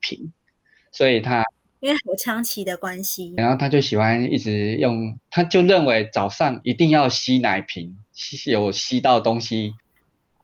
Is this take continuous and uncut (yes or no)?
no